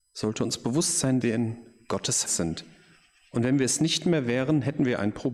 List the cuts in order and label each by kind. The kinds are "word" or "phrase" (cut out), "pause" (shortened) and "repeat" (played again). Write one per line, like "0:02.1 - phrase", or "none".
0:01.2 - word
0:02.2 - word

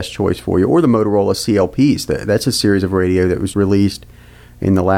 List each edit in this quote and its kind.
0:03.5 - word

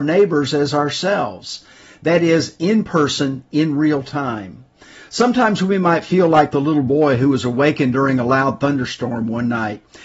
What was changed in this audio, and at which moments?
none

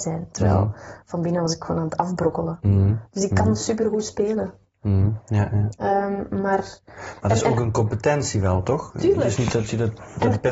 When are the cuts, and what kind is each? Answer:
none

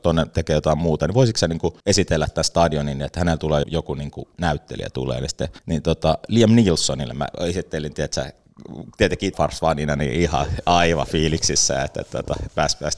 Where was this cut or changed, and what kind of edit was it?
0:01.8 - pause
0:03.6 - word
0:05.6 - pause
0:09.3 - word

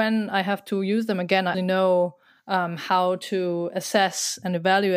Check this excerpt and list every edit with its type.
0:01.5 - word

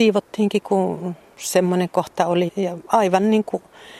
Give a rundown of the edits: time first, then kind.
0:02.5 - word

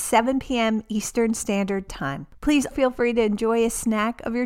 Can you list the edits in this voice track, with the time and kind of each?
0:02.7 - word

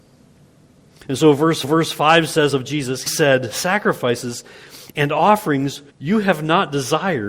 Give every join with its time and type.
0:01.6 - repeat
0:03.1 - word
0:05.9 - pause

